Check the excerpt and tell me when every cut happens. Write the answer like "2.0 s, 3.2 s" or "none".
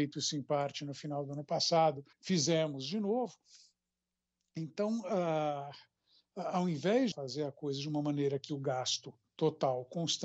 2.1 s, 7.1 s, 8.5 s